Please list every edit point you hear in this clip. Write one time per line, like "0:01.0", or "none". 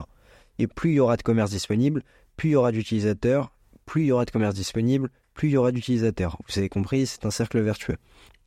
none